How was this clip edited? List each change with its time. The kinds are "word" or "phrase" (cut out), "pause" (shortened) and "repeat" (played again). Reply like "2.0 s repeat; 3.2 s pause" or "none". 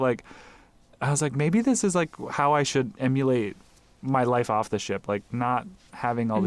none